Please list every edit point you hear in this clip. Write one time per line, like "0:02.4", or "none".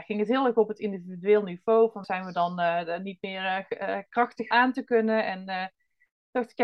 0:02.0
0:04.5